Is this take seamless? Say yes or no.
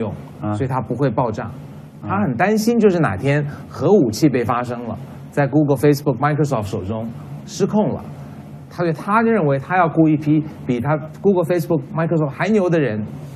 yes